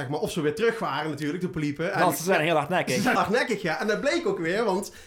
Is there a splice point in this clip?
yes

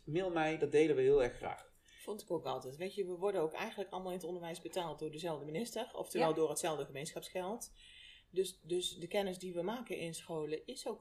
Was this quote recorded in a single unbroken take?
yes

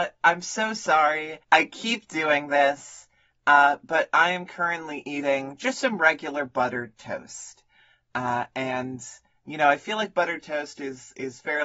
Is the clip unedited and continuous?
no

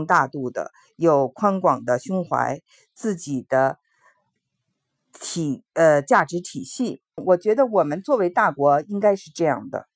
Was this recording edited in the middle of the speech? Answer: yes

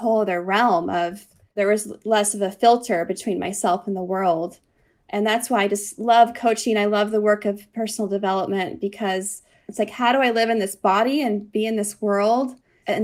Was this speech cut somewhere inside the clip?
no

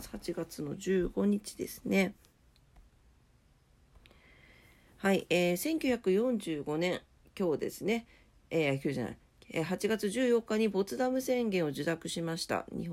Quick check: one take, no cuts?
yes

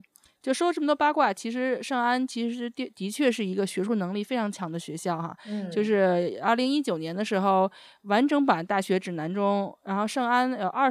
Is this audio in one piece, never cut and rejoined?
yes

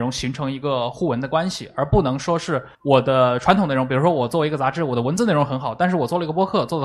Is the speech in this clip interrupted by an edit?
yes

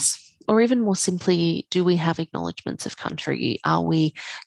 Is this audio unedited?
yes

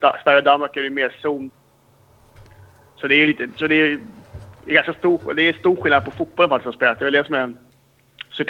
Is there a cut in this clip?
no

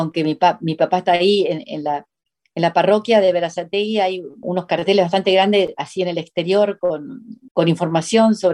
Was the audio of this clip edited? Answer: no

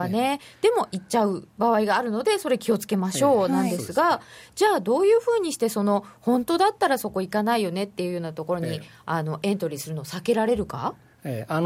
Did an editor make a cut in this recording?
no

